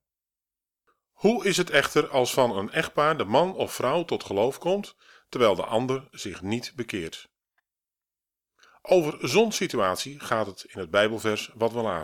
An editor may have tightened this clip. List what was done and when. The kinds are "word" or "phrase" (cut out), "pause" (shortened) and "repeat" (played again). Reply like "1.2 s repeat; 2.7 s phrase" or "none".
none